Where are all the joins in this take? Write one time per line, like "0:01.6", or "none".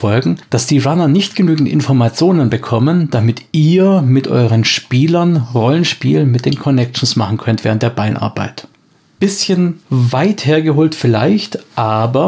none